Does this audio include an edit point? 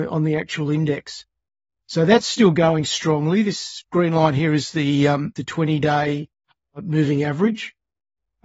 yes; 1 cut; at 5.4 s

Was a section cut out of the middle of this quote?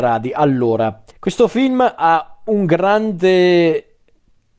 yes; 1 cut; at 1.1 s

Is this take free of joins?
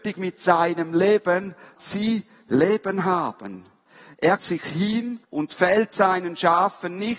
no; 3 cuts; at 1.8 s, 4.4 s, 5.2 s

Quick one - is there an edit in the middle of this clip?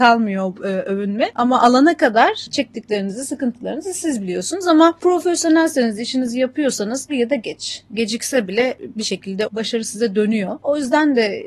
yes; 2 cuts; at 7.1 s, 9.4 s

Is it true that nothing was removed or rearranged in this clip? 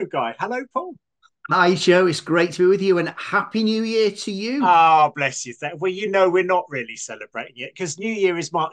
yes; 0 cuts

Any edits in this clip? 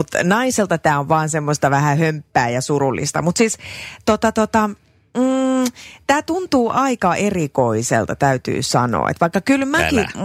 no; 0 cuts

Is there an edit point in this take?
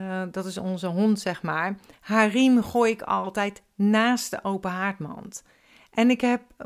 no; 0 cuts

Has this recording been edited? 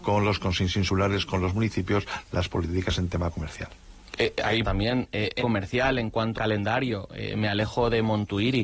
yes; 3 cuts; at 4.6 s, 5.4 s, 6.4 s

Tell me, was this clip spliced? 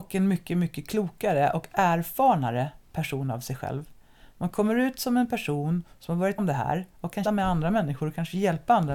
yes; 2 cuts; at 6.4 s, 7.3 s

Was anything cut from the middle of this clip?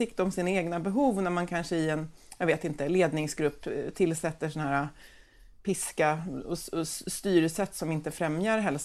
no; 0 cuts

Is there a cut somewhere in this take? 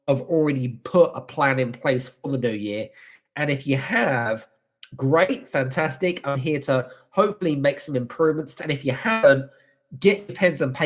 yes; 1 cut; at 8.6 s

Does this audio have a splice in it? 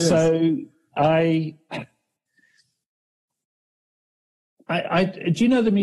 no; 0 cuts

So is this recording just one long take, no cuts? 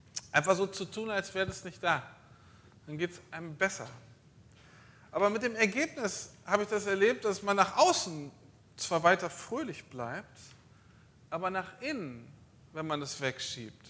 yes; 0 cuts

